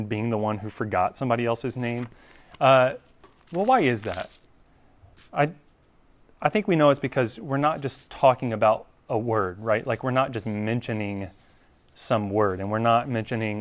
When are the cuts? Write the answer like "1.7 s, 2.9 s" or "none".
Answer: none